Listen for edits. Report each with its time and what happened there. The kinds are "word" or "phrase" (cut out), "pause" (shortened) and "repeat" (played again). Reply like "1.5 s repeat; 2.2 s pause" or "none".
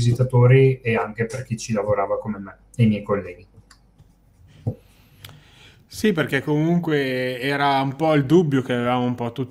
none